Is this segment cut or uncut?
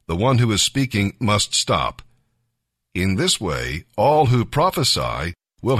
uncut